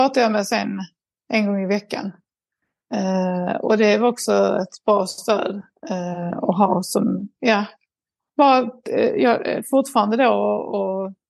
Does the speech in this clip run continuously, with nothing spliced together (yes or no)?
yes